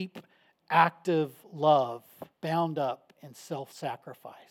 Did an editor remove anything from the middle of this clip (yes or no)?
yes